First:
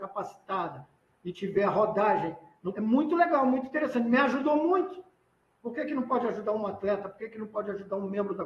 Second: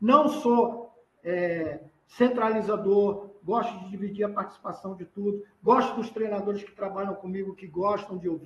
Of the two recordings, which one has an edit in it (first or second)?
first